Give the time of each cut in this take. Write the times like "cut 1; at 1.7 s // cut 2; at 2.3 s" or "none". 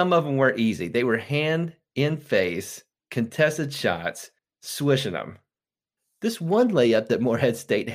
cut 1; at 2.9 s // cut 2; at 4.4 s // cut 3; at 6.0 s